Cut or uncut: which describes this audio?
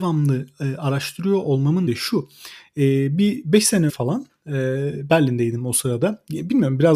cut